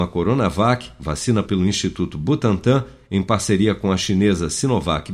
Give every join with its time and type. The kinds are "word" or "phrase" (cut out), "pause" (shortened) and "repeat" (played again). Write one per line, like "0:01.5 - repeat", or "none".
0:01.4 - word